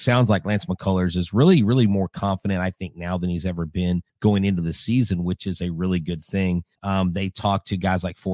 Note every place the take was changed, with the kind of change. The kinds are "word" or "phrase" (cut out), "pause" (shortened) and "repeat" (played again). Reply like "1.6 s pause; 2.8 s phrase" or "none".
4.1 s pause; 6.7 s pause